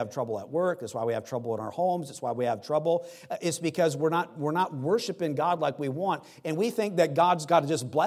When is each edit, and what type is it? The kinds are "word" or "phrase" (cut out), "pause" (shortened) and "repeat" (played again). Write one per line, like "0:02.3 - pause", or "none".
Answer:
none